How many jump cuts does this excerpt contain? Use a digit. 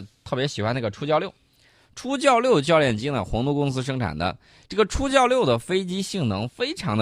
0